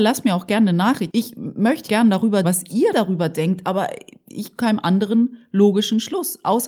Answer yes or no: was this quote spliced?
yes